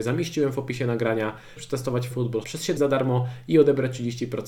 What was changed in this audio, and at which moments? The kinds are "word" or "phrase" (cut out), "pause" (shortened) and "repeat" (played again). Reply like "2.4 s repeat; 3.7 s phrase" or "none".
1.6 s word; 2.1 s word; 2.4 s word; 2.8 s word